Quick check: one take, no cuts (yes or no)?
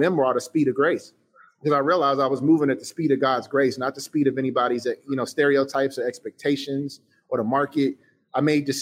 yes